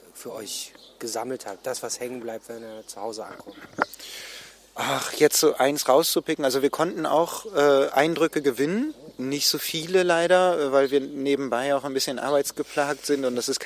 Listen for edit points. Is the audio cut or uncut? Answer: uncut